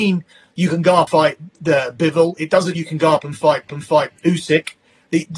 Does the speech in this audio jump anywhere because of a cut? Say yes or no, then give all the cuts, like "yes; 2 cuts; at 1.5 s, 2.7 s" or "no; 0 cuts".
yes; 3 cuts; at 1.1 s, 2.7 s, 3.7 s